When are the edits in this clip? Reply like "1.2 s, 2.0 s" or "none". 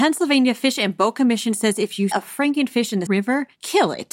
2.1 s, 3.1 s